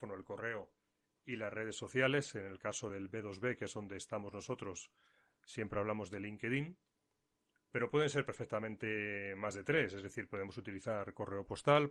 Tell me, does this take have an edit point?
no; 0 cuts

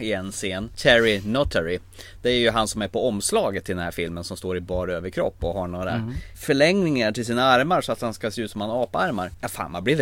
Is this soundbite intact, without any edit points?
yes; 0 cuts

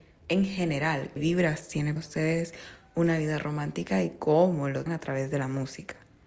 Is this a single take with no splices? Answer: no; 3 cuts; at 1.2 s, 2.0 s, 4.9 s

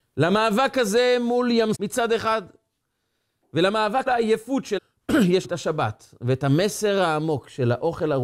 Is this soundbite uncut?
no; 4 cuts; at 1.7 s, 4.1 s, 4.8 s, 5.4 s

